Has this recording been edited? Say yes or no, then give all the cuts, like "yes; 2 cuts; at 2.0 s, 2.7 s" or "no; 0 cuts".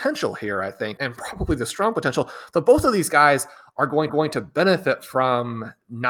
yes; 2 cuts; at 1.0 s, 4.1 s